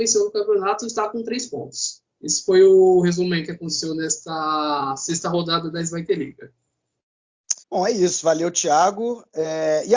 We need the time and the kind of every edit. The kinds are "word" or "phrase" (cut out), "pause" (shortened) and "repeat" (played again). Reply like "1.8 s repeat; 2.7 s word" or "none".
7.6 s pause